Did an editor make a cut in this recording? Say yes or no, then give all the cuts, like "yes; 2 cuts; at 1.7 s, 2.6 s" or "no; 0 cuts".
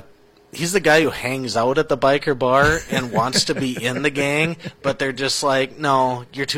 no; 0 cuts